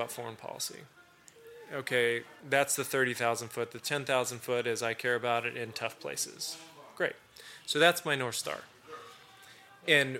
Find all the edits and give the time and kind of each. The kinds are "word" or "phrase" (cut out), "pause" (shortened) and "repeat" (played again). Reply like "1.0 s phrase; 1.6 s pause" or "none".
2.4 s pause